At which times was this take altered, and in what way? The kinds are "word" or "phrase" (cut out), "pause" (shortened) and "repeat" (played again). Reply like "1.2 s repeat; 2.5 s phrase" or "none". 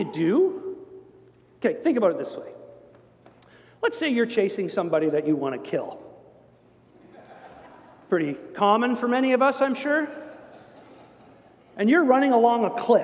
none

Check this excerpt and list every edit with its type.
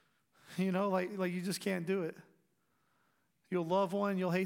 none

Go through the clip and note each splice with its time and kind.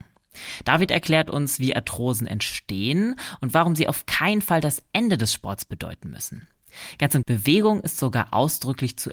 7.2 s word

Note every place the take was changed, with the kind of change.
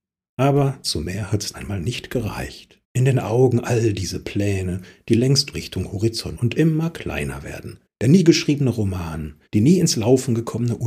1.5 s word; 2.8 s pause; 5.5 s word; 6.4 s word; 7.9 s pause; 9.5 s pause

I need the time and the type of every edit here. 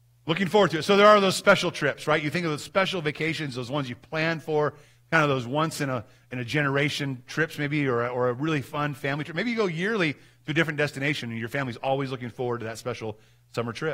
none

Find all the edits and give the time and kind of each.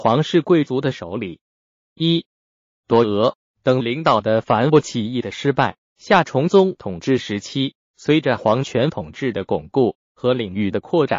1.8 s pause; 5.8 s pause; 7.8 s pause

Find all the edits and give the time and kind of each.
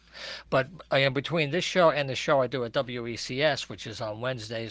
none

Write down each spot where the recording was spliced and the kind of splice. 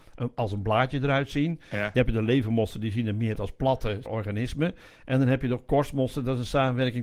3.4 s word

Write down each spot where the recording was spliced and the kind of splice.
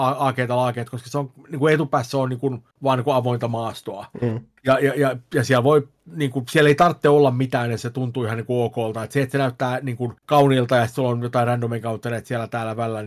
2.7 s pause; 10.2 s pause

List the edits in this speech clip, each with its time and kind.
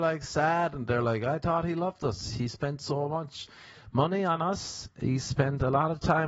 none

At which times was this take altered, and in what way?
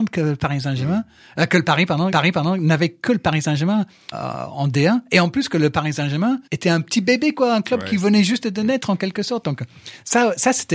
2.1 s repeat; 4.1 s word; 6.5 s pause

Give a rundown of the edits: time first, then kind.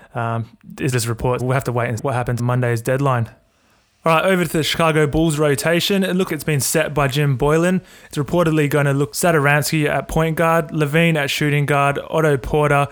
0.9 s word; 1.4 s word; 2.0 s word; 2.4 s word; 6.3 s word; 9.1 s word

